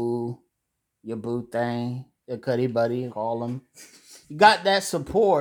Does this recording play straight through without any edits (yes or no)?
no